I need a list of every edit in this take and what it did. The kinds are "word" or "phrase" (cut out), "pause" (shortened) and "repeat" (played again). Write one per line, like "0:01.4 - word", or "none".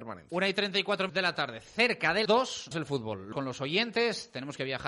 0:01.1 - word
0:02.3 - word
0:02.7 - word
0:03.3 - word